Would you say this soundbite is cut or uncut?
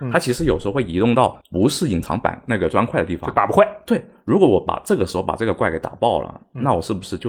cut